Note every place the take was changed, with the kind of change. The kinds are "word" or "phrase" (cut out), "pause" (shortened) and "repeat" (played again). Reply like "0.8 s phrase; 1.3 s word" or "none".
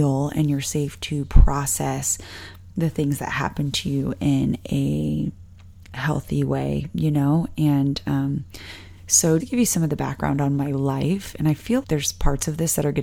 9.4 s word; 11.8 s word